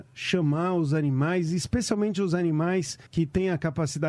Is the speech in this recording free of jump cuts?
no; 1 cut; at 3.1 s

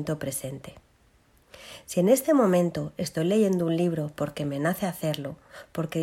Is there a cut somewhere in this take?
no; 0 cuts

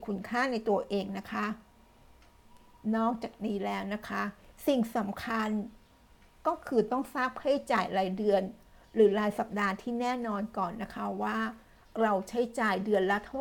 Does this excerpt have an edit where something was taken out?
no; 0 cuts

